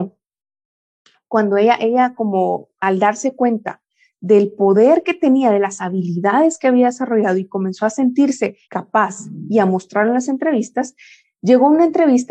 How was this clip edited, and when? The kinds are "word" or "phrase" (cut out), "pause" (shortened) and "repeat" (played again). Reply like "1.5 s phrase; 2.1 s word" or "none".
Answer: 8.6 s pause